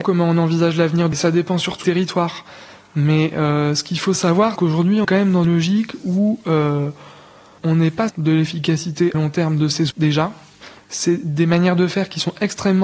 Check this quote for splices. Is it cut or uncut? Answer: cut